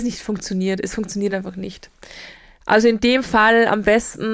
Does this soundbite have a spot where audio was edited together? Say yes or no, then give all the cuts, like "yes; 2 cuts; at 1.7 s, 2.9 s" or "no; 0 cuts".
no; 0 cuts